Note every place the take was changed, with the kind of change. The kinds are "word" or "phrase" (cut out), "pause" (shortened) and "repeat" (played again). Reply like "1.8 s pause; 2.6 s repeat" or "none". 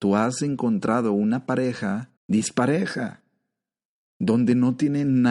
2.2 s pause